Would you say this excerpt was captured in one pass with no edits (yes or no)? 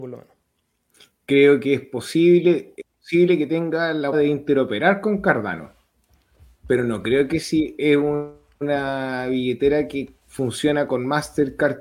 no